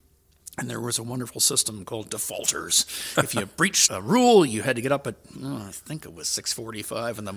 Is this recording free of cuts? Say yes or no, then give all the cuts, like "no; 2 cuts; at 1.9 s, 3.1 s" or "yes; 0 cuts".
no; 1 cut; at 3.9 s